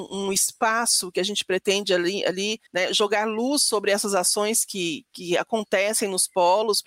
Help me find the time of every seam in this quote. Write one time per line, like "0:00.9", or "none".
0:02.7